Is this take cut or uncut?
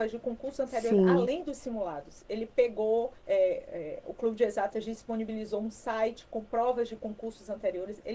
cut